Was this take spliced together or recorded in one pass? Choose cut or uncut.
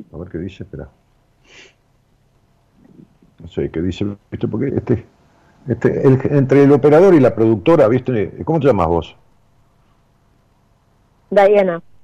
cut